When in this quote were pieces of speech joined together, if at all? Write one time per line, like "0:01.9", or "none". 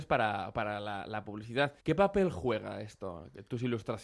0:01.8